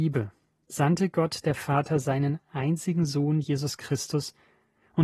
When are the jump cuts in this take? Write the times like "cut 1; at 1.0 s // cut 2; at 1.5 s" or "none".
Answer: none